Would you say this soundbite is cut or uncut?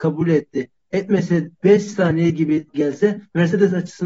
cut